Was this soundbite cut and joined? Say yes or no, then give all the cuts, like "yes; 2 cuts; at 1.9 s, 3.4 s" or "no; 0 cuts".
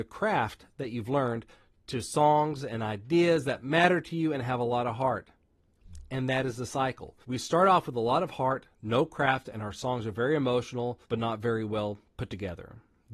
yes; 2 cuts; at 7.2 s, 11.0 s